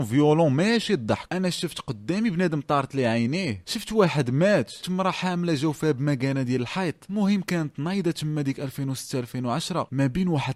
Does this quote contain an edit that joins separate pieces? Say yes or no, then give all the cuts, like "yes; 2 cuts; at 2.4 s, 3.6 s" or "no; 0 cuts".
yes; 1 cut; at 4.8 s